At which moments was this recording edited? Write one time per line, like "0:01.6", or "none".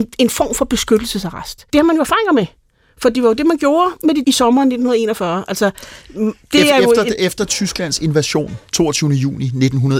0:01.7
0:04.2